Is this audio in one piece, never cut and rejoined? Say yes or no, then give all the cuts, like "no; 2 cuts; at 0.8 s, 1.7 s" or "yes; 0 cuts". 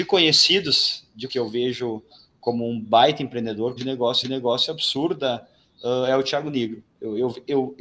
no; 3 cuts; at 1.3 s, 3.8 s, 4.2 s